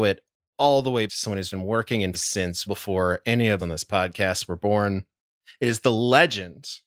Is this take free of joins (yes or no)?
no